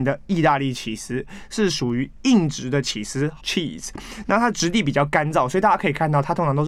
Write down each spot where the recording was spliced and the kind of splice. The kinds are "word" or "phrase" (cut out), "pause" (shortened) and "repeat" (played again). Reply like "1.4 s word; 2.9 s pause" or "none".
3.4 s word